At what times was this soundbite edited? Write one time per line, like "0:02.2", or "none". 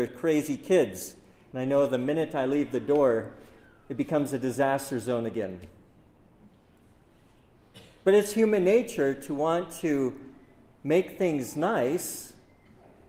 none